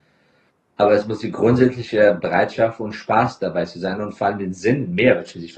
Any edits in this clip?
no; 0 cuts

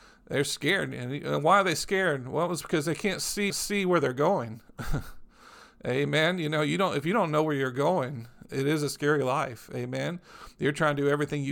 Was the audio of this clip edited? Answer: yes; 1 cut; at 3.5 s

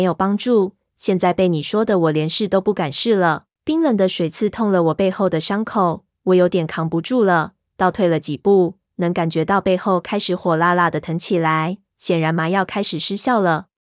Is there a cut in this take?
yes; 1 cut; at 3.5 s

